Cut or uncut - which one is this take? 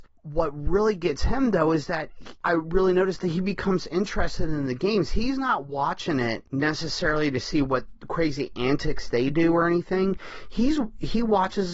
uncut